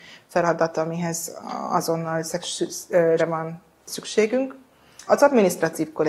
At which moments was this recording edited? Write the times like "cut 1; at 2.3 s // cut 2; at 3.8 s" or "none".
cut 1; at 3.2 s // cut 2; at 5.1 s